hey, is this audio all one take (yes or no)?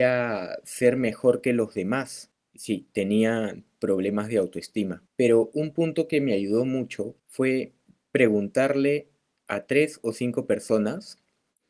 no